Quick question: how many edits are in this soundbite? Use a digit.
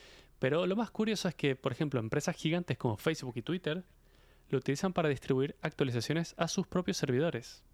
0